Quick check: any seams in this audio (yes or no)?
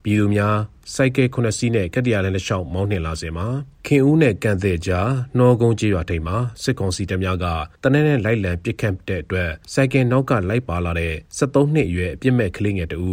yes